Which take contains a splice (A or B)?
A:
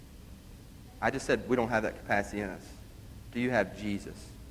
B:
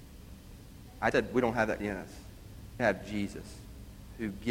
B